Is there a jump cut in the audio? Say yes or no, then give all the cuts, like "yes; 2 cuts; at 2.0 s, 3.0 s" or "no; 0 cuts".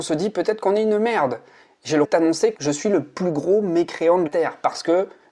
yes; 3 cuts; at 2.0 s, 2.5 s, 4.3 s